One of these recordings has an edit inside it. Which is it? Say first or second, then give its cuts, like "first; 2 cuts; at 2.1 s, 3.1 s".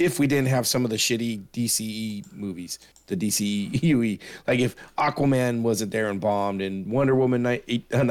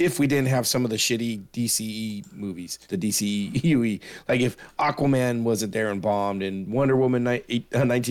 second; 1 cut; at 2.8 s